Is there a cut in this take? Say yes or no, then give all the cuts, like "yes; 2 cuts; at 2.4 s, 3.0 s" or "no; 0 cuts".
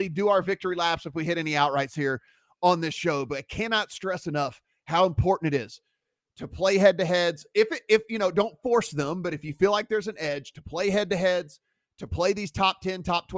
no; 0 cuts